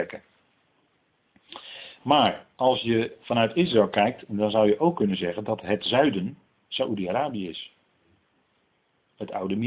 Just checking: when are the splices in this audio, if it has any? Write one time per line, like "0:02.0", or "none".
none